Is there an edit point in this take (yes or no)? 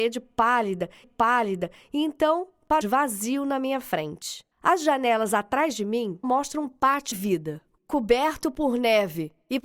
yes